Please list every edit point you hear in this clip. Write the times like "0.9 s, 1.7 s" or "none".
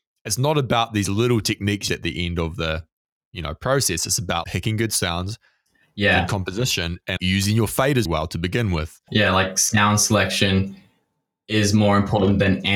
1.9 s, 4.4 s, 7.2 s, 8.0 s, 9.1 s